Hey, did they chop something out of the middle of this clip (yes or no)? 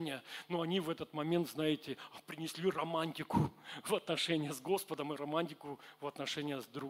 no